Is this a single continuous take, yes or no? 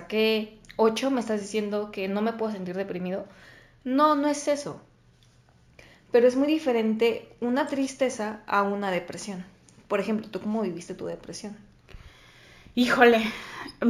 yes